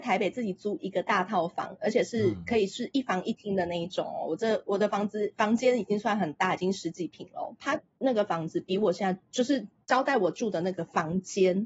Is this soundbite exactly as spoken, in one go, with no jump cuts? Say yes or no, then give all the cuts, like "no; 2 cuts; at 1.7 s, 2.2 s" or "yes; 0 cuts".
yes; 0 cuts